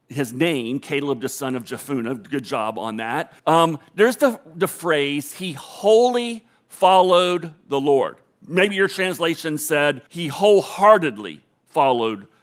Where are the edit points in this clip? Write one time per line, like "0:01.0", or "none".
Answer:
0:03.4
0:10.1